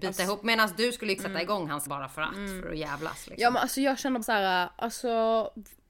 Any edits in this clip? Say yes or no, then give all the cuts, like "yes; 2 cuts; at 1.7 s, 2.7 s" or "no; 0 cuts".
yes; 3 cuts; at 1.2 s, 1.9 s, 4.2 s